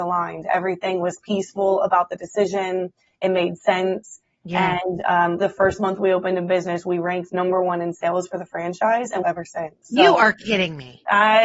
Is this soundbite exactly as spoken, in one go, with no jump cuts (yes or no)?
no